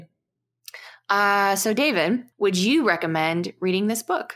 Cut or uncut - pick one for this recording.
cut